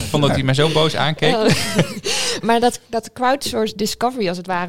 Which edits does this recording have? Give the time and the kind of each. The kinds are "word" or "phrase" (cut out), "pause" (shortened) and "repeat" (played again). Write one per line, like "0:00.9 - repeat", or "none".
0:02.4 - word